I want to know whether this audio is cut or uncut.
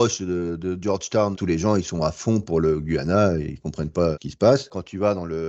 uncut